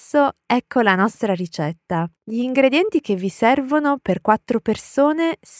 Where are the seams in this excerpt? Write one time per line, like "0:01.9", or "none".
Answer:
0:02.2